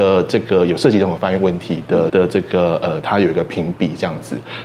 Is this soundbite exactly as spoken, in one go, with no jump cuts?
no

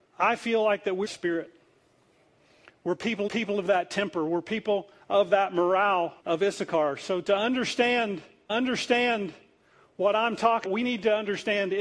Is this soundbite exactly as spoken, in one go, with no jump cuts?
no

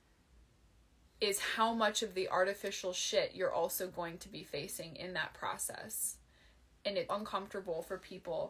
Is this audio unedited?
no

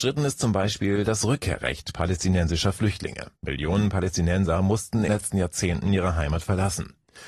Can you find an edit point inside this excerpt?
yes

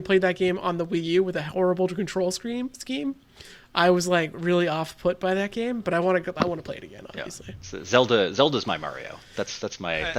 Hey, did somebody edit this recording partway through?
no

